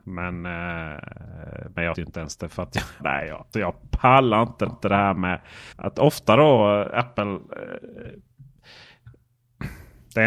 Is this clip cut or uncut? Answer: cut